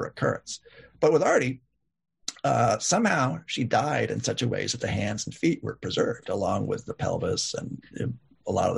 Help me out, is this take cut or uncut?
uncut